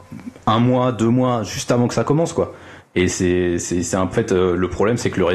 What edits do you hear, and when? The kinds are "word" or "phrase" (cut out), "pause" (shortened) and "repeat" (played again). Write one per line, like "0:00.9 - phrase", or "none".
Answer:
0:04.1 - word